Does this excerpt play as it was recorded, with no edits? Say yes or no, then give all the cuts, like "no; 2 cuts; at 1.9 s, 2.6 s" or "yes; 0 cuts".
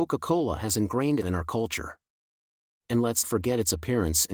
no; 2 cuts; at 1.2 s, 3.2 s